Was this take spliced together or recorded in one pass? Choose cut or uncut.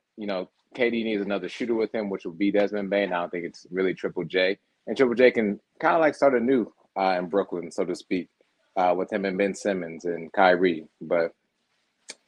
cut